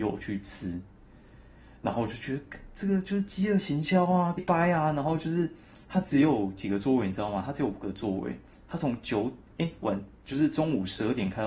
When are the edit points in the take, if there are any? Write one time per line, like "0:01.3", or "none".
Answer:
0:04.4
0:05.8
0:10.2